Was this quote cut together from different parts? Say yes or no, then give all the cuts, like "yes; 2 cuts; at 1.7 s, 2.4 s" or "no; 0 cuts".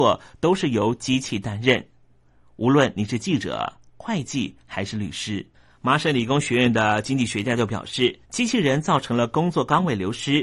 yes; 1 cut; at 8.2 s